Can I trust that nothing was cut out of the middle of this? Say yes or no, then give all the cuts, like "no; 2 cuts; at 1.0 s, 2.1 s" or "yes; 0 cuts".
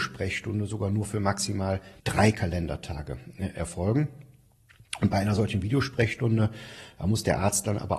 no; 1 cut; at 2.0 s